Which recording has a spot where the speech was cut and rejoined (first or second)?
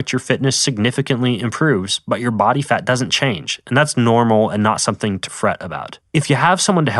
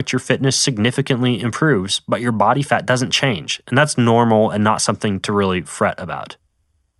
first